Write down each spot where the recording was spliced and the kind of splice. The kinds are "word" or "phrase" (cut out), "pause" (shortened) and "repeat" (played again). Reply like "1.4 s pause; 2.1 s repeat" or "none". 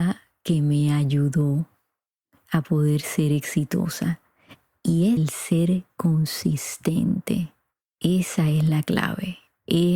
5.2 s word